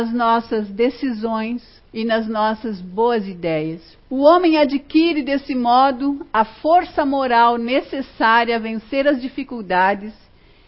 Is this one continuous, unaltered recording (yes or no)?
no